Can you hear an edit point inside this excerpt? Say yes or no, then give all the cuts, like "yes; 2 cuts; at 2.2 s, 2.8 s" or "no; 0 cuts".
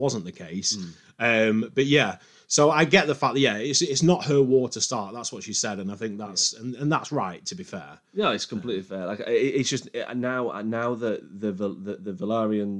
no; 0 cuts